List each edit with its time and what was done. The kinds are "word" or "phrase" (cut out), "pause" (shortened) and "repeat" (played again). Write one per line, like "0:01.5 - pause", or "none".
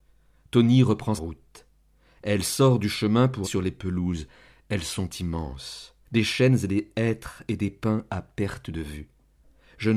0:01.2 - word
0:03.4 - word
0:06.0 - pause